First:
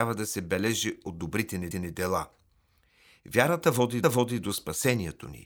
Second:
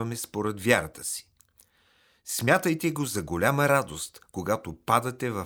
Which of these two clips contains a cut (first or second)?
first